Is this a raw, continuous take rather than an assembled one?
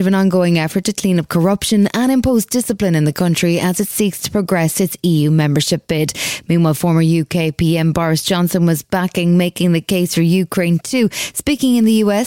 yes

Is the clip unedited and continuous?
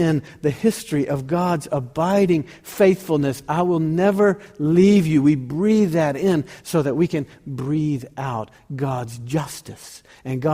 yes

